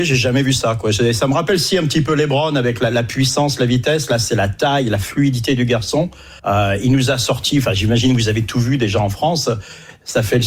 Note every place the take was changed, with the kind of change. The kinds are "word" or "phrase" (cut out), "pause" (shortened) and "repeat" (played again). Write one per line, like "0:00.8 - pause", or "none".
0:06.4 - pause